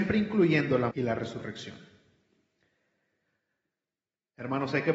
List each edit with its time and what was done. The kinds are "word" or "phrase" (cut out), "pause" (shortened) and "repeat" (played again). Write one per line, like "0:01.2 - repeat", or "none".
0:00.9 - word